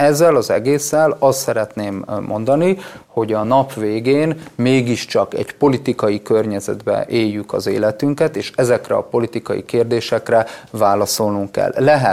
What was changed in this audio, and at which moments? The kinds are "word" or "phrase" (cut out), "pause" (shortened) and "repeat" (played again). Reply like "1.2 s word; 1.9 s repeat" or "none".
none